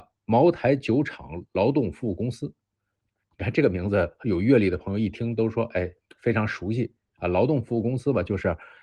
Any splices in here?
no; 0 cuts

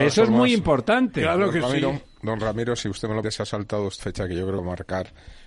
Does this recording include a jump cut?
yes; 3 cuts; at 3.2 s, 4.0 s, 4.6 s

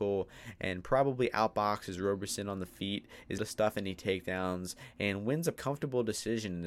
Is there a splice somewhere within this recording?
yes; 2 cuts; at 3.4 s, 5.6 s

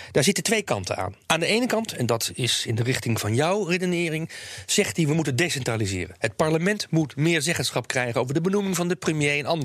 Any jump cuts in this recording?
yes; 1 cut; at 1.2 s

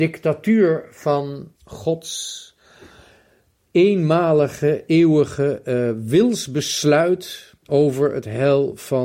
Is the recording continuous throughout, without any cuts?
no; 2 cuts; at 1.5 s, 7.6 s

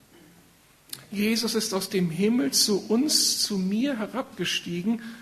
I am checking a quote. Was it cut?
no; 0 cuts

